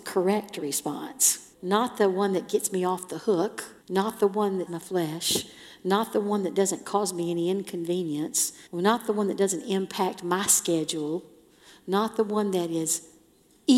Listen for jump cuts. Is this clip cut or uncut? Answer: cut